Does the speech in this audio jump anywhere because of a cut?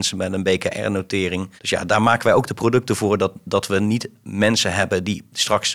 yes; 1 cut; at 1.6 s

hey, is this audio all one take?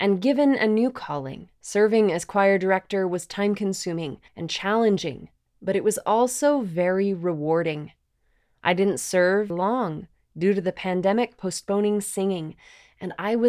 no; 3 cuts; at 1.6 s, 4.3 s, 9.5 s

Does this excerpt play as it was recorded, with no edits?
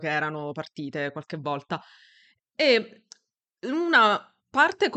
yes; 0 cuts

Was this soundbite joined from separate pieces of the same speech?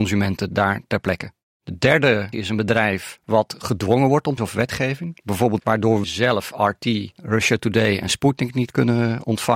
yes; 5 cuts; at 1.5 s, 2.3 s, 4.4 s, 5.6 s, 6.0 s

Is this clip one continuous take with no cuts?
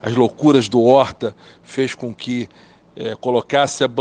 yes; 0 cuts

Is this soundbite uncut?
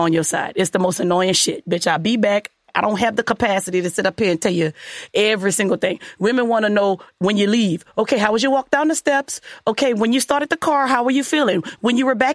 yes; 0 cuts

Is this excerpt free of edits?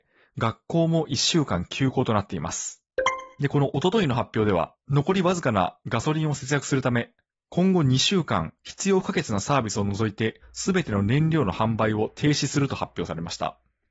no; 2 cuts; at 3.3 s, 8.6 s

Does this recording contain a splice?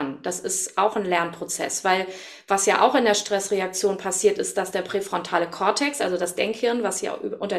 no; 0 cuts

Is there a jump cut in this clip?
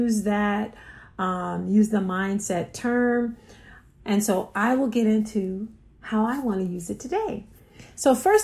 no; 0 cuts

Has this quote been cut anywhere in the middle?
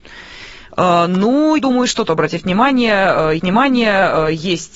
yes; 3 cuts; at 1.6 s, 2.1 s, 3.4 s

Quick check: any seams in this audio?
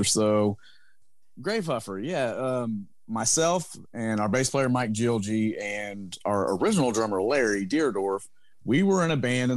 no; 0 cuts

